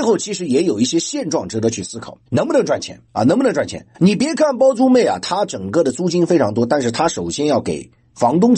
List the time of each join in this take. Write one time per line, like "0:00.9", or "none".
0:02.3
0:03.1
0:03.9

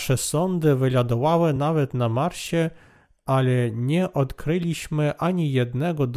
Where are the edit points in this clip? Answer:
none

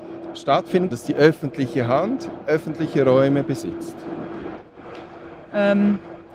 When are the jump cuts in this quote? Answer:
0:00.9

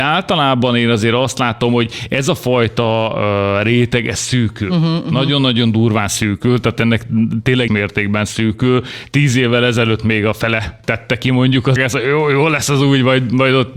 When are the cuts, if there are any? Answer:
0:07.7
0:11.8

